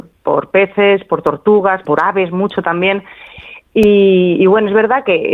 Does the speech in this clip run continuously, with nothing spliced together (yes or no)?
no